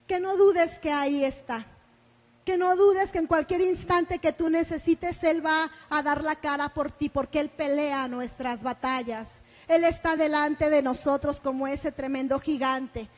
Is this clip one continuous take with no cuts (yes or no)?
yes